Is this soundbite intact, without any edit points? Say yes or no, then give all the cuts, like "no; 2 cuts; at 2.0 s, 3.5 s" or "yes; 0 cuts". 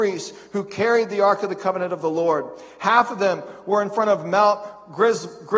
yes; 0 cuts